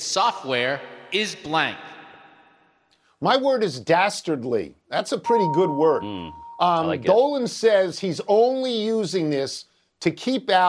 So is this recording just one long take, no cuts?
yes; 0 cuts

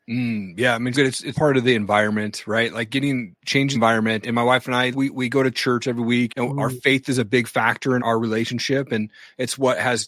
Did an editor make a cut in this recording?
yes; 7 cuts; at 0.9 s, 1.3 s, 3.7 s, 4.2 s, 4.9 s, 6.3 s, 8.0 s

